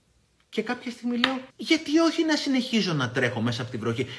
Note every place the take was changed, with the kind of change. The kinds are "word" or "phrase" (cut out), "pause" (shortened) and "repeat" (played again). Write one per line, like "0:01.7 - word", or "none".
0:01.5 - pause